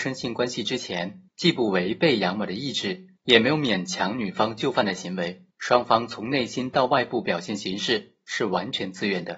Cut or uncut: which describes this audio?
cut